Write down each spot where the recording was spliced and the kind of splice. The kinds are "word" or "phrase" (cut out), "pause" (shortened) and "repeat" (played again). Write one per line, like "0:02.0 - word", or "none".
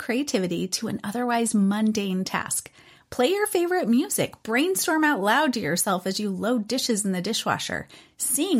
none